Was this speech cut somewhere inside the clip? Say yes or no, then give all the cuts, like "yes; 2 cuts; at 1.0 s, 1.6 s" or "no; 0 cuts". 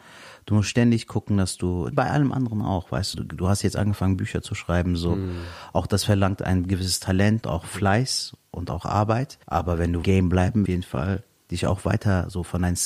yes; 6 cuts; at 1.9 s, 3.1 s, 7.4 s, 9.4 s, 10.0 s, 10.7 s